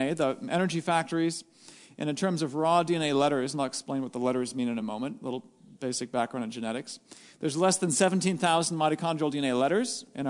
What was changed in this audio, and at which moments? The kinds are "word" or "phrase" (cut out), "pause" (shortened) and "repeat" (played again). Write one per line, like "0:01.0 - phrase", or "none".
none